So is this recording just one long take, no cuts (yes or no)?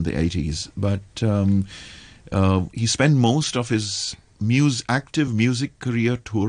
yes